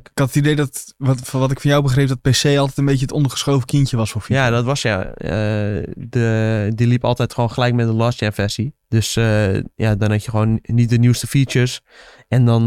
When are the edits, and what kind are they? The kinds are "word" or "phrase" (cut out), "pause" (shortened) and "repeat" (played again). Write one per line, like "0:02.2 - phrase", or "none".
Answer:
0:08.8 - pause